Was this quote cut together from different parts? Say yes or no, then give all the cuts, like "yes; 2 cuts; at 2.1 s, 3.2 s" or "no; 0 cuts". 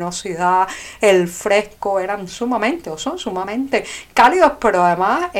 no; 0 cuts